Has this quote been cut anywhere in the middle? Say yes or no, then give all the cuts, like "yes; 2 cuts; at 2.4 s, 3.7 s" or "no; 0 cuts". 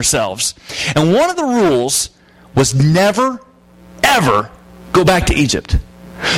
no; 0 cuts